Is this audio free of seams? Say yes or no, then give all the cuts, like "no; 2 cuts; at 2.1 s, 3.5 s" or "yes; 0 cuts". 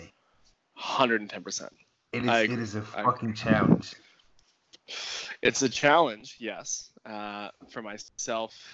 yes; 0 cuts